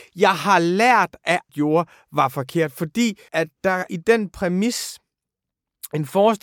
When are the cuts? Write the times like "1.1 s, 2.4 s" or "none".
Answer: 1.5 s, 3.3 s, 3.9 s